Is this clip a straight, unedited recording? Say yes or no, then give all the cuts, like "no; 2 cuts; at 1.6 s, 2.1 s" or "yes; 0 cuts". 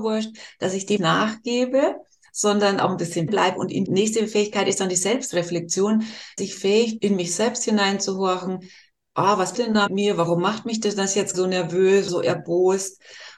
no; 9 cuts; at 1.0 s, 3.3 s, 3.9 s, 6.4 s, 7.0 s, 9.5 s, 9.9 s, 11.3 s, 12.1 s